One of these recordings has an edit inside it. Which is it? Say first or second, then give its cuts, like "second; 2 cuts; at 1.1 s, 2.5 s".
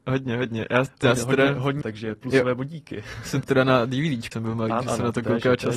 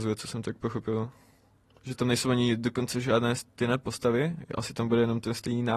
first; 4 cuts; at 1.8 s, 3.4 s, 4.3 s, 4.8 s